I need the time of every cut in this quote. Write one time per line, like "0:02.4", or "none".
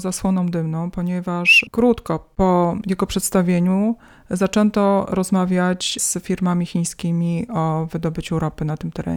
none